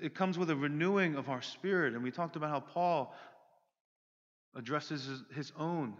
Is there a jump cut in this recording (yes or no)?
no